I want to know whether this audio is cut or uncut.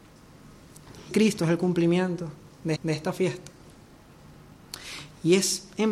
cut